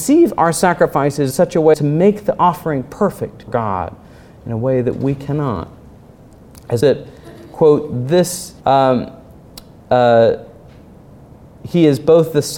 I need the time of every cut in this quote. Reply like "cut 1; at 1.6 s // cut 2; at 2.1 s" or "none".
cut 1; at 1.3 s // cut 2; at 1.7 s // cut 3; at 3.5 s // cut 4; at 6.8 s // cut 5; at 8.6 s